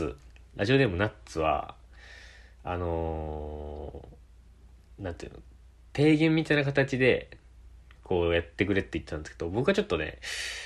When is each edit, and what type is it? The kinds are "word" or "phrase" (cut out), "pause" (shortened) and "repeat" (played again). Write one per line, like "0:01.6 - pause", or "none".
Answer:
none